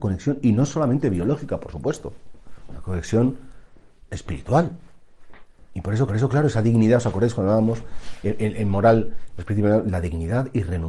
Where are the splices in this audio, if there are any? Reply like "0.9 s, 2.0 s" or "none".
6.1 s